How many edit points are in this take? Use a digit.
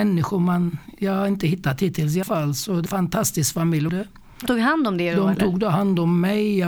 4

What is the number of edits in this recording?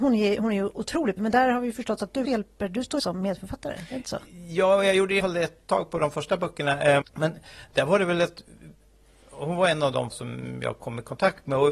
6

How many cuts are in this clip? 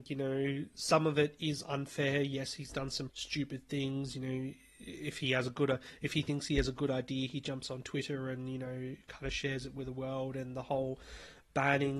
1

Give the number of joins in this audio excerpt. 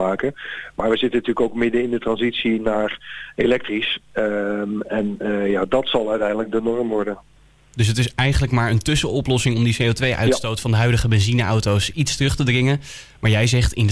0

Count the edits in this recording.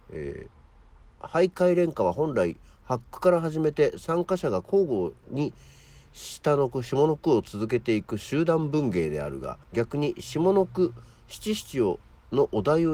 1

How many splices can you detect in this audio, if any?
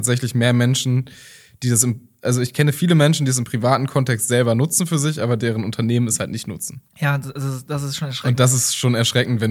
1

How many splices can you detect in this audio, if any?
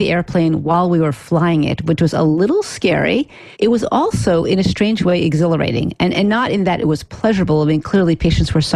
1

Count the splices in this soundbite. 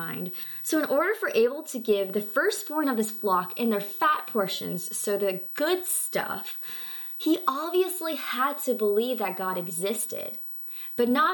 0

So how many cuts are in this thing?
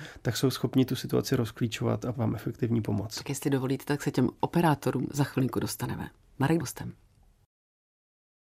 2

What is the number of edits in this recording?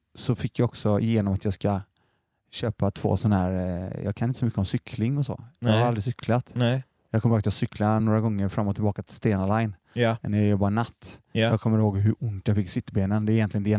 0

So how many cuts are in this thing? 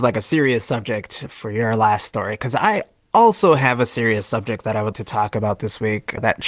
1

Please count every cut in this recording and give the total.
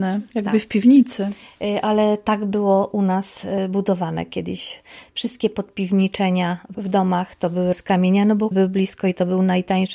2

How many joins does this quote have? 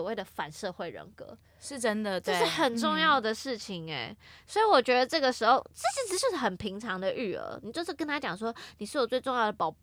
0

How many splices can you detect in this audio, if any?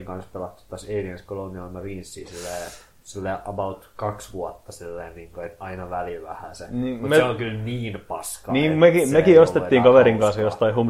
0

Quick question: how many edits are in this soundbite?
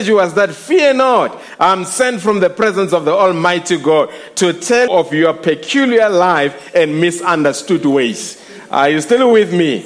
1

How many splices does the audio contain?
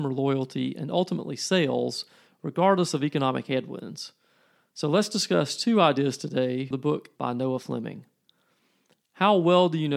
2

